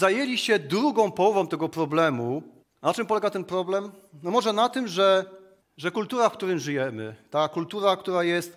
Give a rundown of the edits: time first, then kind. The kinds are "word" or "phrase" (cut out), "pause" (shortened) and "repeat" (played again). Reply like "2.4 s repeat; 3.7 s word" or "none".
2.6 s pause; 5.6 s pause

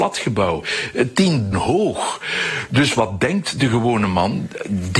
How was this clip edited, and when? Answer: 1.5 s word

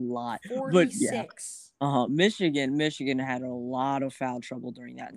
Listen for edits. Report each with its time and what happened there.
none

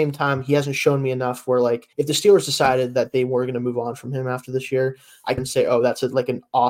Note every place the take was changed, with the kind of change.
1.9 s pause; 5.4 s phrase

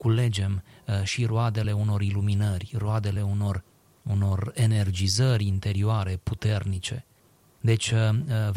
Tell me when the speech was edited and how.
none

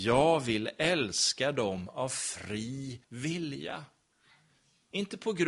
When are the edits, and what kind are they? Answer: 3.0 s pause

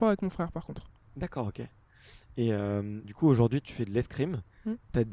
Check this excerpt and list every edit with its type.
3.0 s word; 3.6 s word

